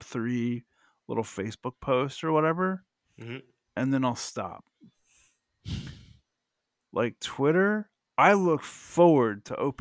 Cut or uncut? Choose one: uncut